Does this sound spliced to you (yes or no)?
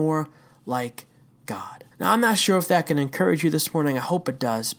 yes